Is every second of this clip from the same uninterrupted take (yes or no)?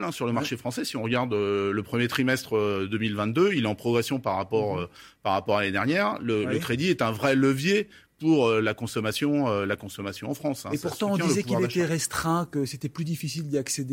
yes